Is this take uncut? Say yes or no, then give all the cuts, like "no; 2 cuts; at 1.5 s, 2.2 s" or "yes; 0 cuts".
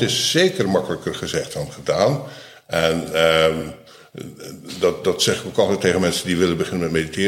yes; 0 cuts